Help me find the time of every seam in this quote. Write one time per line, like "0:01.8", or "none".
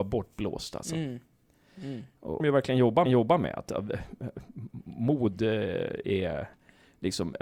0:02.4
0:03.0